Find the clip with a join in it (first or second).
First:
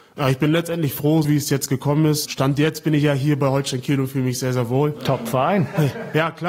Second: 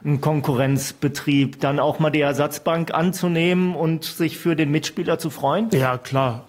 first